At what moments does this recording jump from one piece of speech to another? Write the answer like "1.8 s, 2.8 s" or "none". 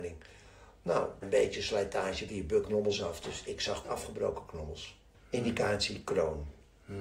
1.2 s, 2.3 s, 2.6 s, 3.8 s, 5.1 s

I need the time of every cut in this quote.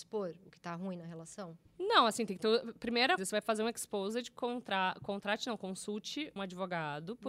1.7 s, 3.2 s, 6.4 s

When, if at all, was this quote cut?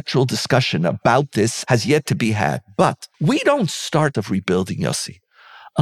3.1 s, 4.1 s

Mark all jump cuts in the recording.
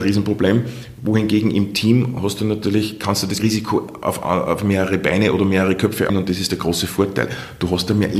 3.4 s, 6.1 s

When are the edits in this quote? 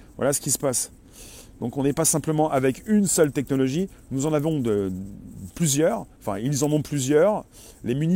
6.2 s

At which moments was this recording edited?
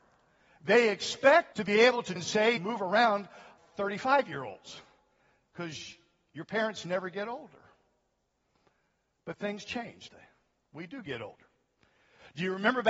1.5 s, 2.2 s, 2.6 s, 3.6 s, 10.1 s

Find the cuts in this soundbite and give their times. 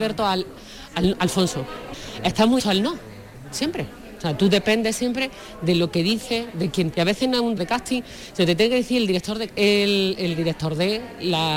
2.6 s, 6.9 s, 7.6 s, 9.5 s

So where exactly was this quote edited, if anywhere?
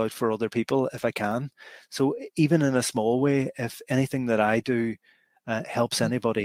none

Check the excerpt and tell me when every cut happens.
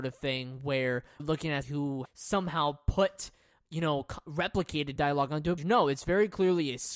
1.2 s, 1.6 s, 2.0 s, 5.0 s, 5.6 s

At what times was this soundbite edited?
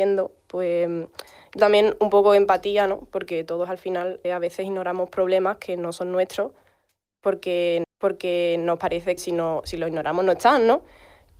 1.6 s, 4.2 s, 7.8 s, 9.2 s

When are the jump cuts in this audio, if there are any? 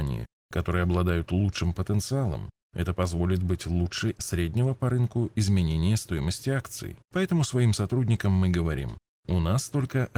4.2 s, 7.0 s

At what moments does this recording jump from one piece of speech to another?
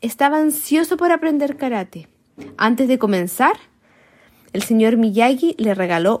none

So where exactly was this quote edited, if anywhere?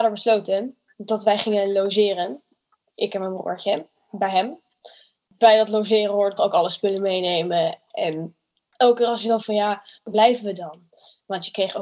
6.4 s, 9.4 s, 10.1 s

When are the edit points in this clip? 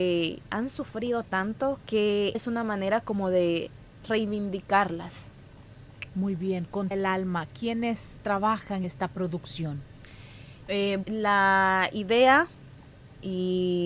1.8 s, 2.3 s, 6.9 s, 8.8 s, 11.0 s

